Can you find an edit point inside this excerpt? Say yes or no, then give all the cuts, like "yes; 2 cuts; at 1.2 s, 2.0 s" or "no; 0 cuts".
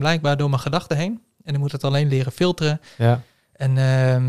no; 0 cuts